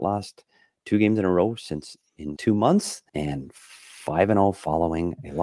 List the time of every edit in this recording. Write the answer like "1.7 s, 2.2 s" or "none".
2.4 s, 3.1 s